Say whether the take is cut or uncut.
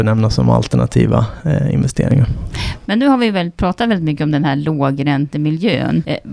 uncut